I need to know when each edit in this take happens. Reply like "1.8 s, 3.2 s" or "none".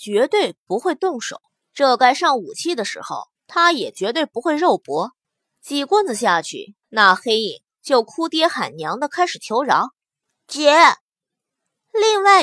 1.5 s, 3.4 s, 5.2 s, 6.8 s, 10.2 s